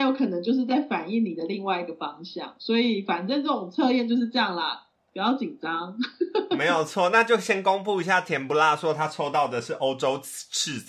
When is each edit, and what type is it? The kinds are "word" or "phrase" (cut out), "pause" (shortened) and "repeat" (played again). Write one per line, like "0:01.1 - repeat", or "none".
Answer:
none